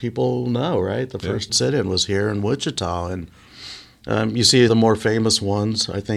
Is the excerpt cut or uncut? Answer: cut